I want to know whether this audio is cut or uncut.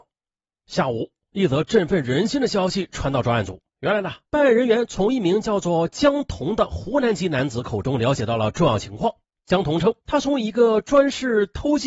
cut